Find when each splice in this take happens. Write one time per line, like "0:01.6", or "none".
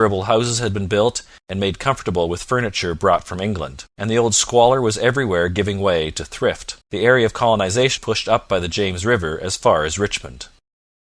0:03.9
0:06.8
0:08.0

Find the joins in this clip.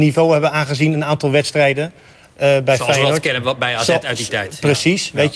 none

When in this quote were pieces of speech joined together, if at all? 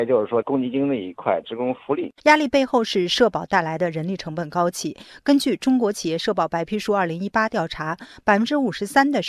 0:02.2

